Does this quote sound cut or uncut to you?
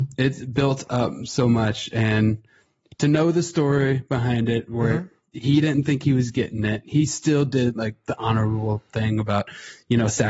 uncut